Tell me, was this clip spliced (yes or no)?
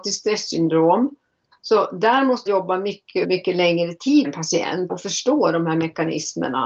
yes